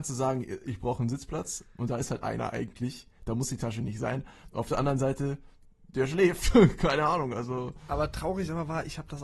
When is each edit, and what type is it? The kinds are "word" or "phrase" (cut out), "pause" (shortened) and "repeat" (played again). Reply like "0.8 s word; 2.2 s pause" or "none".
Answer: none